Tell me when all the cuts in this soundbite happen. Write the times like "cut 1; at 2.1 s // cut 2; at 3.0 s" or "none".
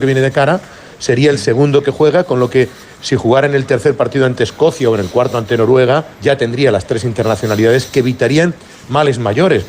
cut 1; at 6.1 s